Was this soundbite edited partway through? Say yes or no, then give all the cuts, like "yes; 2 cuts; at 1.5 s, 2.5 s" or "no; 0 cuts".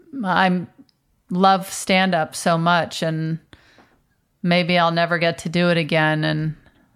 no; 0 cuts